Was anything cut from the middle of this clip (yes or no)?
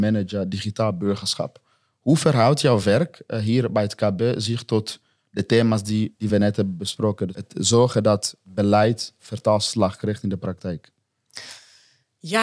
no